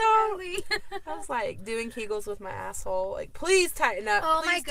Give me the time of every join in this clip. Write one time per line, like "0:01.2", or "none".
none